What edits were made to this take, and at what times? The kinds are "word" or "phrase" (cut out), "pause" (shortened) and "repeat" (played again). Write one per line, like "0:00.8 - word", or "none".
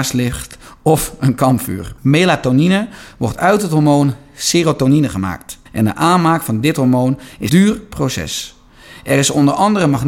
0:02.0 - pause
0:05.7 - pause
0:07.5 - word